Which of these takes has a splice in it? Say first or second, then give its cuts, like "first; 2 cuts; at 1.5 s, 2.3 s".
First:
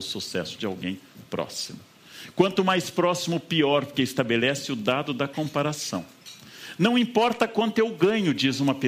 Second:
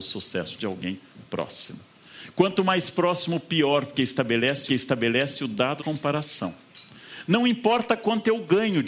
second; 2 cuts; at 4.7 s, 5.8 s